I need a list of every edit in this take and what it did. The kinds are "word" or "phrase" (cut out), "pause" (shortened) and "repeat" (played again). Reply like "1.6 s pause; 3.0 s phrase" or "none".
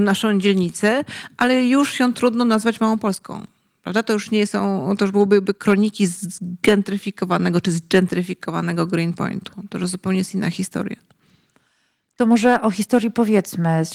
none